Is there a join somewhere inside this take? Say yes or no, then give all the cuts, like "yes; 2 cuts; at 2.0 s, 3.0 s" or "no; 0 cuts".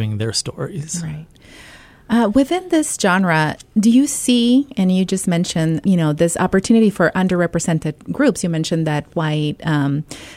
yes; 2 cuts; at 5.8 s, 9.1 s